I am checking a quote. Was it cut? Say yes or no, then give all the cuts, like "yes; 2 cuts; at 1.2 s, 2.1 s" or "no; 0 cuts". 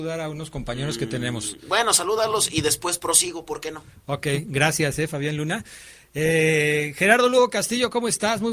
no; 0 cuts